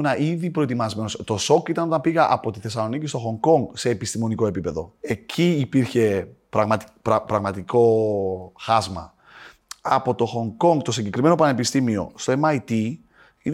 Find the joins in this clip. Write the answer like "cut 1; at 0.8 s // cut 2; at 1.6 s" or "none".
cut 1; at 5.0 s